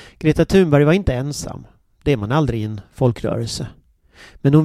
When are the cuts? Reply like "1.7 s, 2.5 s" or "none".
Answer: none